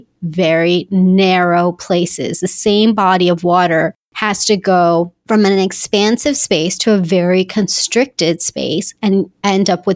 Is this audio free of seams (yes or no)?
yes